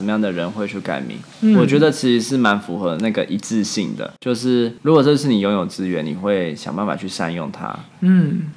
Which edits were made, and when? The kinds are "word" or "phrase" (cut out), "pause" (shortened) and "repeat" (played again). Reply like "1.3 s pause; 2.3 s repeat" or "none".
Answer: 1.3 s pause; 4.2 s pause